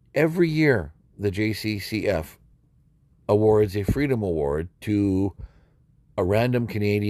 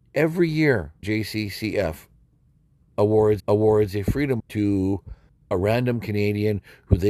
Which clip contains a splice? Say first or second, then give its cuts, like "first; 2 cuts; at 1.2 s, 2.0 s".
second; 4 cuts; at 1.0 s, 3.4 s, 4.4 s, 5.3 s